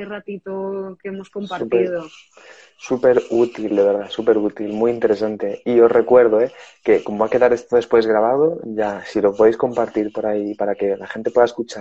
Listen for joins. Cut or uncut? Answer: uncut